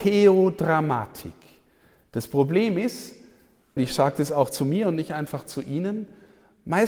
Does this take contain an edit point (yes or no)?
yes